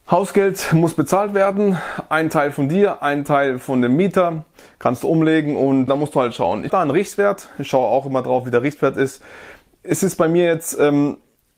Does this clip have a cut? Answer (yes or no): yes